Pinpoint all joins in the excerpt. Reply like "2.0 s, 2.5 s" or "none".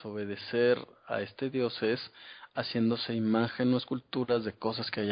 none